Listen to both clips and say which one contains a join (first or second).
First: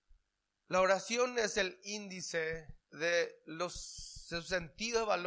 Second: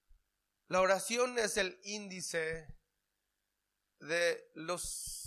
first